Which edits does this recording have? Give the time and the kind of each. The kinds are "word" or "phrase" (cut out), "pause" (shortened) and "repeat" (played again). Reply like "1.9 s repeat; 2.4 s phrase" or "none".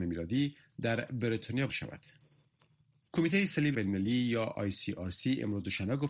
1.7 s word; 3.7 s word